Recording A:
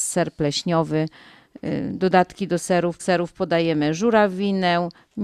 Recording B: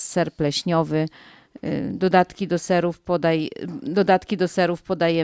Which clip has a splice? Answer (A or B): A